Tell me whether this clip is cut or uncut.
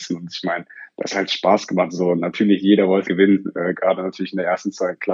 cut